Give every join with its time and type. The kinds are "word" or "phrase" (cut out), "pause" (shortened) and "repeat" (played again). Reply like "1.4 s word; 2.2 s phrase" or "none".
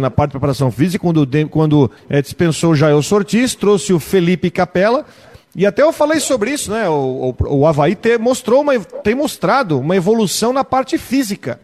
2.0 s pause